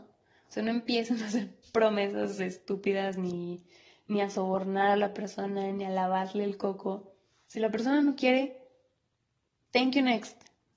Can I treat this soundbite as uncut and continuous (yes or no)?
yes